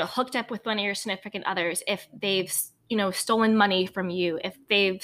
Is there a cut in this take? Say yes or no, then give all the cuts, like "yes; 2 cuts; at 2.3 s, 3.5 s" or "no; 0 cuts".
no; 0 cuts